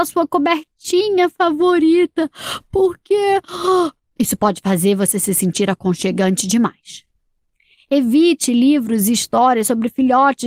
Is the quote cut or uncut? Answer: uncut